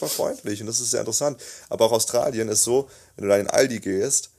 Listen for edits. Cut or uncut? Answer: uncut